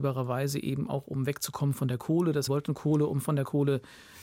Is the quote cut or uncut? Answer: cut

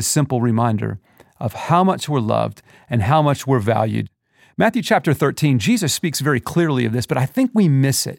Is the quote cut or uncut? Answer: uncut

